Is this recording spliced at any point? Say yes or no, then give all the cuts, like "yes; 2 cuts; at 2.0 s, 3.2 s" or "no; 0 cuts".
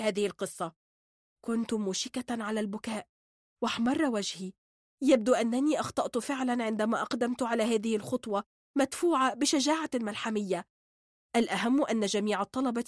no; 0 cuts